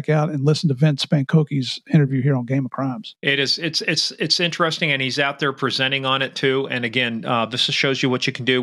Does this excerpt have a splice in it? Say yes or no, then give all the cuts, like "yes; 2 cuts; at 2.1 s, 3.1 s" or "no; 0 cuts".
no; 0 cuts